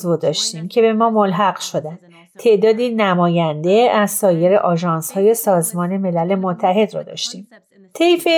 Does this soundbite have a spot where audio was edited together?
no; 0 cuts

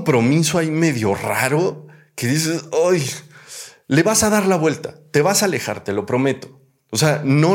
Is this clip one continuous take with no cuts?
yes; 0 cuts

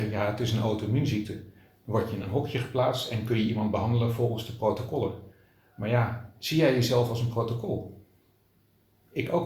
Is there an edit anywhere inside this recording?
no; 0 cuts

